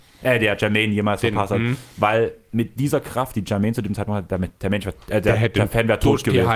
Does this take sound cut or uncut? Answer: uncut